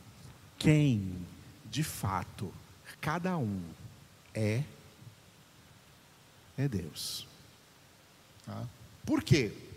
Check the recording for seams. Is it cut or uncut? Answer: uncut